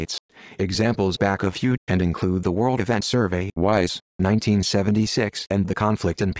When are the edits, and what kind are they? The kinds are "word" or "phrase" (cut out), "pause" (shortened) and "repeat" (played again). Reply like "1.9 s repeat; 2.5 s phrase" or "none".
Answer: 1.2 s word; 1.8 s word; 3.0 s word; 4.1 s word